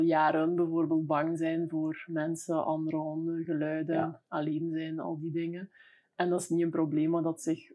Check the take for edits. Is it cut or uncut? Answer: uncut